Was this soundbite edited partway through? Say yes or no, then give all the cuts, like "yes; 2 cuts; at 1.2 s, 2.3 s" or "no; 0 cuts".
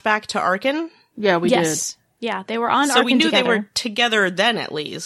no; 0 cuts